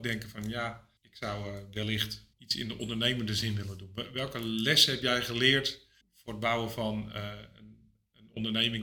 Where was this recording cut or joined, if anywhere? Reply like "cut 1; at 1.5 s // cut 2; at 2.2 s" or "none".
cut 1; at 1.0 s // cut 2; at 2.3 s // cut 3; at 6.0 s